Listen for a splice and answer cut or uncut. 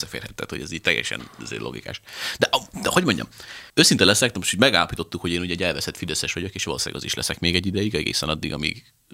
cut